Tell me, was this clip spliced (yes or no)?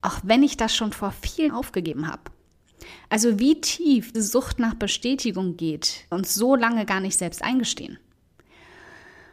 yes